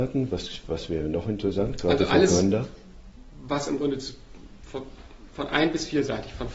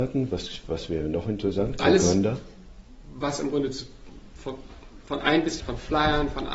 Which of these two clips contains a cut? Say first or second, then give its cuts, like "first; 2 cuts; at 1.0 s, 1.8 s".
second; 2 cuts; at 1.8 s, 5.6 s